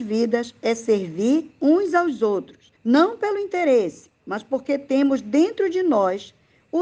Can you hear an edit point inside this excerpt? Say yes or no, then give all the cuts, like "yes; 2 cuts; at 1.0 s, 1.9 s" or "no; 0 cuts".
yes; 1 cut; at 2.8 s